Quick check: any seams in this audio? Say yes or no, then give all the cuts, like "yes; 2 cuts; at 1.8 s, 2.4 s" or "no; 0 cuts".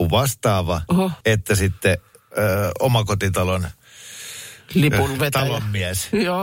yes; 1 cut; at 1.2 s